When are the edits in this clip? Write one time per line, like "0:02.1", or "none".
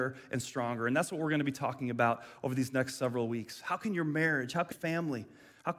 0:04.7